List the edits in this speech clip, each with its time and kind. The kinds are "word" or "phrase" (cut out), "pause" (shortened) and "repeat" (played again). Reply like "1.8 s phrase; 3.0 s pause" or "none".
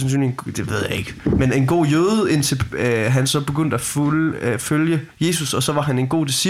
5.1 s pause